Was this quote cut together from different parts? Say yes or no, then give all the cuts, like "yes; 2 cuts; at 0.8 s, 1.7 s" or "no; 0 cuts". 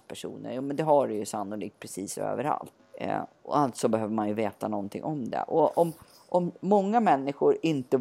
no; 0 cuts